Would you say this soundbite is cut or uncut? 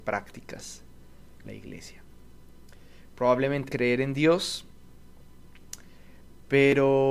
cut